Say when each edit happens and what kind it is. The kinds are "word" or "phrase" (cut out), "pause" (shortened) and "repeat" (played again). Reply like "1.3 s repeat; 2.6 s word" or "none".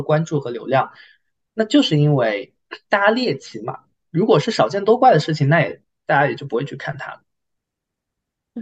none

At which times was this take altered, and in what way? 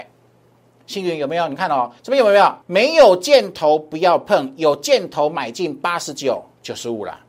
2.0 s pause; 2.6 s pause

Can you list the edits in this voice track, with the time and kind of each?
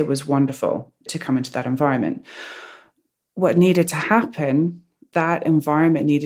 5.1 s word

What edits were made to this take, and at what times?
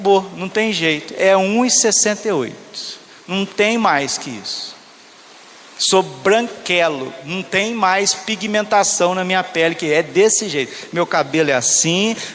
none

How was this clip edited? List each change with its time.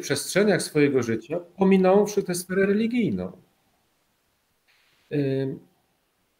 none

